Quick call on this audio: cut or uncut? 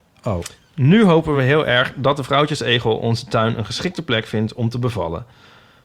uncut